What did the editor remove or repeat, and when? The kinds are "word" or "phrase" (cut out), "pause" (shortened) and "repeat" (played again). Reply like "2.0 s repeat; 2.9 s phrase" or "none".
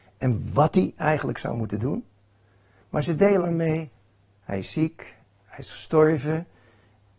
3.4 s word